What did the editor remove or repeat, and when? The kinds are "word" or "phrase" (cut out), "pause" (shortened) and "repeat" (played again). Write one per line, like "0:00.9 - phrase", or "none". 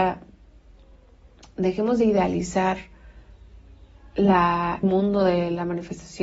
0:04.8 - word